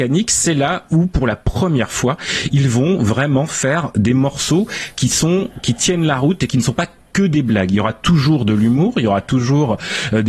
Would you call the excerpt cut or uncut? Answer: uncut